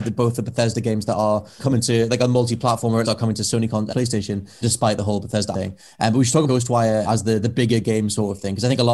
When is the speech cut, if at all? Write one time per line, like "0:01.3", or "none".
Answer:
0:01.6
0:03.0
0:03.9
0:04.6
0:05.5
0:06.5
0:07.0